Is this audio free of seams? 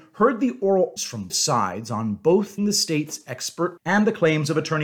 no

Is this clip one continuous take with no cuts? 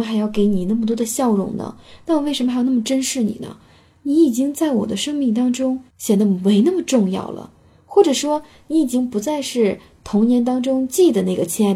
no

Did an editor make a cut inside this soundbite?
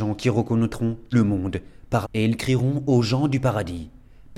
yes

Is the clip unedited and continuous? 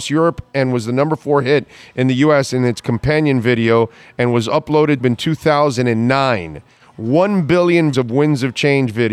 no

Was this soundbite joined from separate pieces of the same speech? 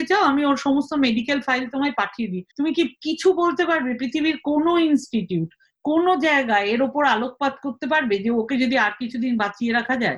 yes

